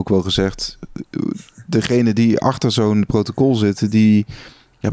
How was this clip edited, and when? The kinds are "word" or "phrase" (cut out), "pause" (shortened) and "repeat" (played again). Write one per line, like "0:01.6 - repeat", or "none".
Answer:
none